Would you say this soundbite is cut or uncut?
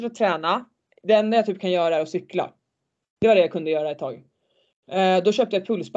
uncut